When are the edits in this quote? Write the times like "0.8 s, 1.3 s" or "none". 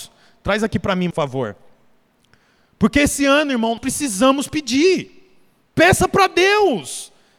1.1 s, 3.8 s